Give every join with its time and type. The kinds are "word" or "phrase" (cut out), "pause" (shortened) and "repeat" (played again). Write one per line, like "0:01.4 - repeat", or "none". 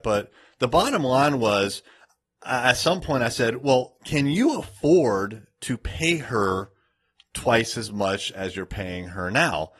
none